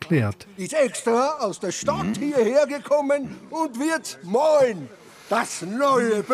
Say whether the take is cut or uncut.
uncut